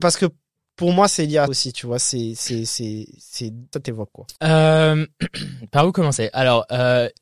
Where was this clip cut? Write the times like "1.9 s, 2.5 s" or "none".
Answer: 1.5 s, 3.7 s, 4.4 s

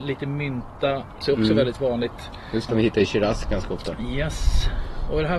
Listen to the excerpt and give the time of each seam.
1.2 s, 2.7 s

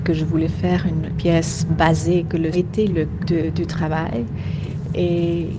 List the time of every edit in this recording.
1.1 s, 1.7 s, 2.5 s, 2.9 s, 3.2 s

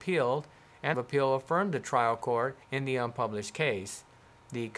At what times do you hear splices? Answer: 0.9 s, 2.6 s

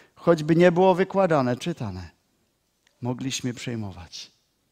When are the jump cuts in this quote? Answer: 1.6 s

